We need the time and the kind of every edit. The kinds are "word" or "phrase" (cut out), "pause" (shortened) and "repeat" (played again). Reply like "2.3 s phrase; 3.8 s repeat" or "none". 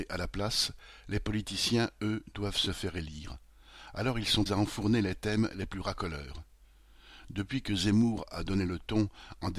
4.5 s word